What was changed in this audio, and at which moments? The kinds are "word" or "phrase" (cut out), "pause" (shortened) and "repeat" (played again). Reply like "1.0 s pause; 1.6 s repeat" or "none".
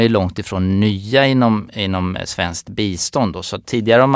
none